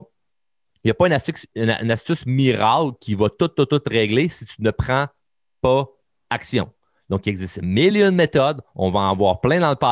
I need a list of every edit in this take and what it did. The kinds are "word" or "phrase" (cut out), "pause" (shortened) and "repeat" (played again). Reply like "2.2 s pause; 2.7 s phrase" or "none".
none